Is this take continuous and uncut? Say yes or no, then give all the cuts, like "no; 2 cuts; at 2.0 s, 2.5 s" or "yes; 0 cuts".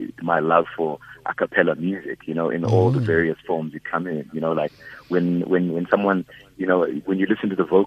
yes; 0 cuts